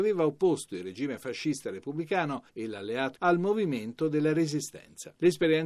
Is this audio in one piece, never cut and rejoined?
no; 1 cut; at 3.1 s

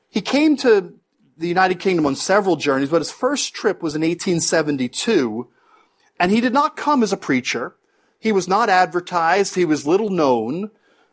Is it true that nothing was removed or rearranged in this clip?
yes; 0 cuts

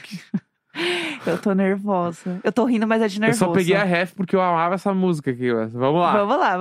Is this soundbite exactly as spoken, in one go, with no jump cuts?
yes; 0 cuts

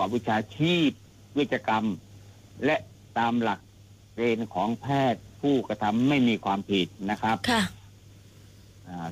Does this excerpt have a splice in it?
no; 0 cuts

